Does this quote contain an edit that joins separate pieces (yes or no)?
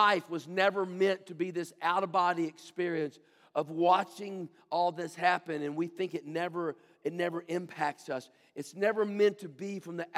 no